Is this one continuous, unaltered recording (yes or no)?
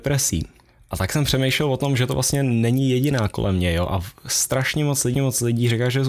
no